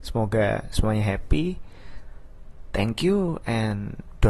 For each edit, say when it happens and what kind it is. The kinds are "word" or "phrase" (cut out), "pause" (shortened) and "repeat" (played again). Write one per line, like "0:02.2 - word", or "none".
none

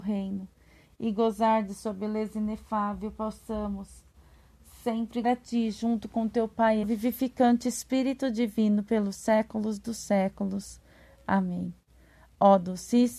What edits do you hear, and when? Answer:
0:05.2 - word
0:06.8 - phrase

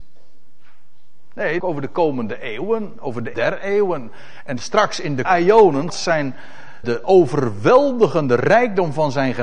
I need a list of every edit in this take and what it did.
0:01.6 - phrase
0:03.3 - word
0:05.2 - word
0:05.9 - phrase
0:06.8 - word

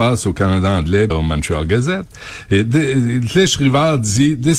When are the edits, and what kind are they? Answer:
0:01.1 - word

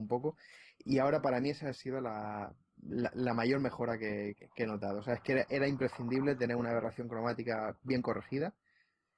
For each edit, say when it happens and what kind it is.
none

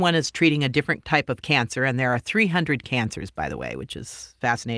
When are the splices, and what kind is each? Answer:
none

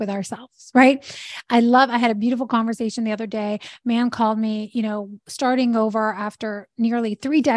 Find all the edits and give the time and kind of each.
none

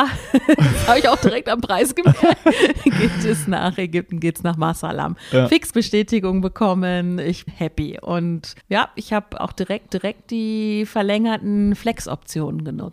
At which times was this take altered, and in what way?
0:05.7 - word
0:07.5 - word
0:08.6 - pause
0:09.4 - word
0:09.9 - repeat

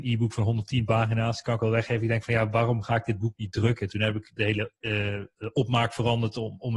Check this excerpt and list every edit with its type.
0:04.8 - pause

